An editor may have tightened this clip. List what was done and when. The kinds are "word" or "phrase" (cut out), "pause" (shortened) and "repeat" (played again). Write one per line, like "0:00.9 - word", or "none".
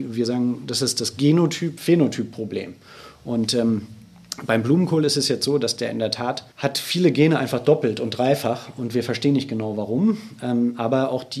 0:06.5 - pause